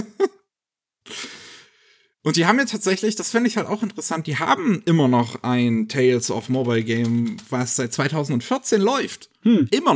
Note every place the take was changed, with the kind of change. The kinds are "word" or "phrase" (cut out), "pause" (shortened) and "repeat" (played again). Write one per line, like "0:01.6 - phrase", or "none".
none